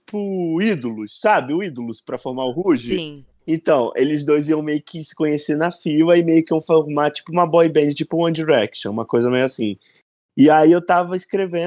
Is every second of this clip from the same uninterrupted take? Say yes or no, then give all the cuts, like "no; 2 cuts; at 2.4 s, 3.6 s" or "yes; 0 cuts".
yes; 0 cuts